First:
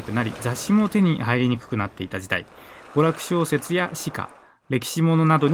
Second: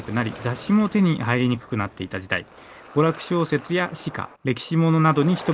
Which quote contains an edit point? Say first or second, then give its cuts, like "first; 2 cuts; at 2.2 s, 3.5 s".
second; 1 cut; at 4.3 s